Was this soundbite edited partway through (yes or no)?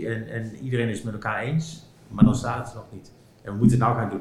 no